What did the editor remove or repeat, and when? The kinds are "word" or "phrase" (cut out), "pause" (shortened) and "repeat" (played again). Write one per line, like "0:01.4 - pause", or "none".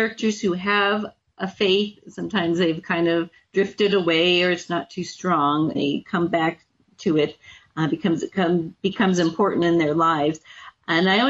0:05.7 - word
0:09.6 - word